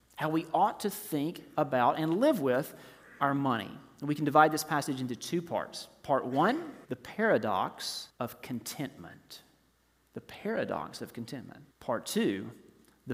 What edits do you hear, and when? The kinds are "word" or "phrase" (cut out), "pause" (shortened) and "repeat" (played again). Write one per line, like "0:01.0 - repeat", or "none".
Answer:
0:06.8 - pause
0:08.1 - pause
0:11.7 - pause